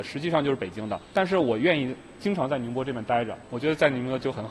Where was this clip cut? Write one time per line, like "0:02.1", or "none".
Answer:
0:01.0